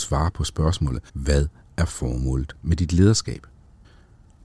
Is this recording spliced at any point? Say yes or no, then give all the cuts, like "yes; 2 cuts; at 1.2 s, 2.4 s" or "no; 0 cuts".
yes; 1 cut; at 1.1 s